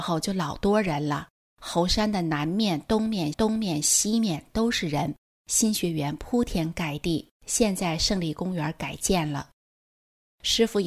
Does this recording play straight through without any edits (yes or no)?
no